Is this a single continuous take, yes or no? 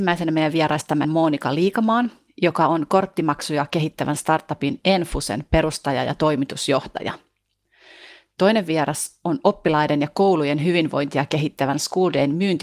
no